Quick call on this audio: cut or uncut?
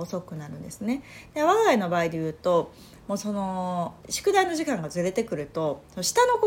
cut